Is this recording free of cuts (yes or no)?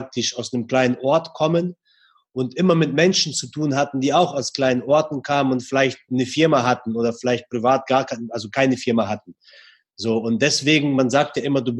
yes